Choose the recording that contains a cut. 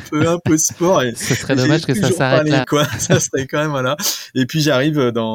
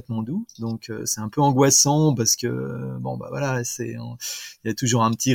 first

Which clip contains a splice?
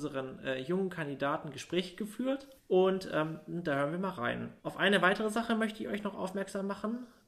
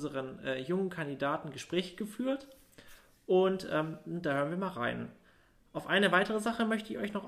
first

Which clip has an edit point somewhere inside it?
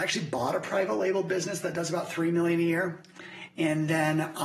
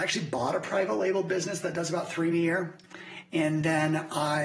second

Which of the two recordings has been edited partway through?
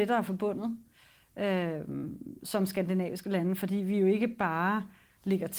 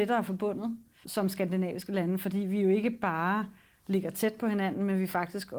second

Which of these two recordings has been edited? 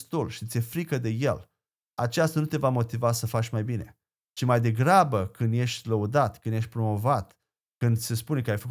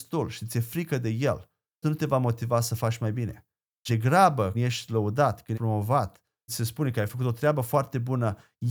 second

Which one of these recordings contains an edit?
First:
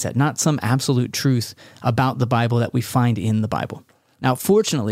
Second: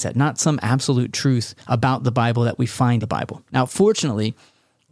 second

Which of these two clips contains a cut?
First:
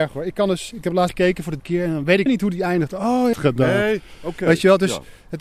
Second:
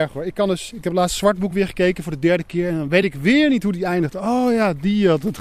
first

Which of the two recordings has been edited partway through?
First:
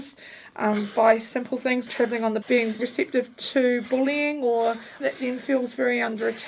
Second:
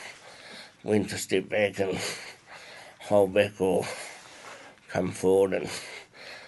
first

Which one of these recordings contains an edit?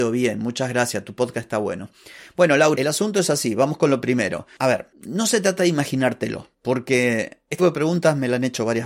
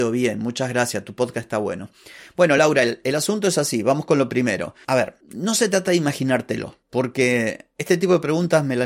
first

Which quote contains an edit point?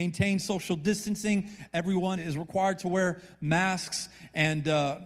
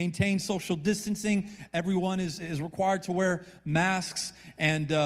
first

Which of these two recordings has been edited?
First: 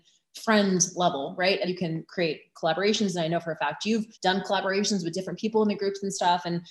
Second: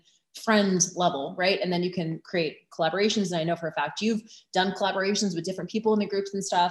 first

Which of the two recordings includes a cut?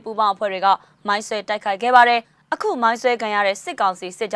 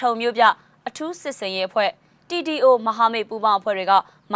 first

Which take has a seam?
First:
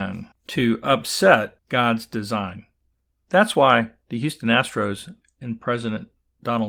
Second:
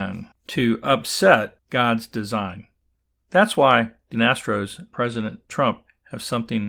second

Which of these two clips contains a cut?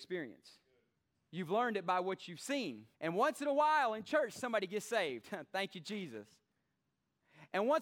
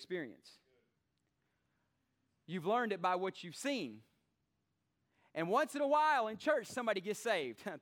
first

